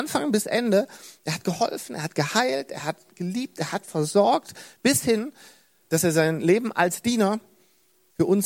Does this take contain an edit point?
no; 0 cuts

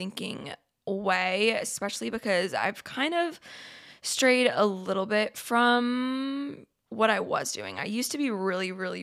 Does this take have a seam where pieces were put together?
no; 0 cuts

